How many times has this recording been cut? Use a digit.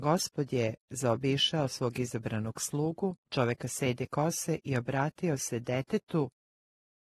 1